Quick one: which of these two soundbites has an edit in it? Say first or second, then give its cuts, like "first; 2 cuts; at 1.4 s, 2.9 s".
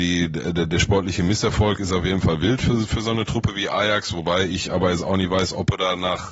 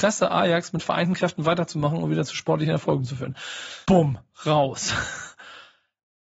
second; 1 cut; at 3.8 s